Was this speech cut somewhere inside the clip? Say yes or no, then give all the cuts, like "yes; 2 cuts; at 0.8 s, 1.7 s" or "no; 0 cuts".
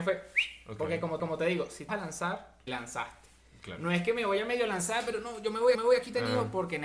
yes; 4 cuts; at 1.2 s, 1.9 s, 2.7 s, 5.7 s